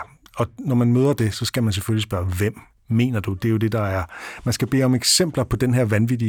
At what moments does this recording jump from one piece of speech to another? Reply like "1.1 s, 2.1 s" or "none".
none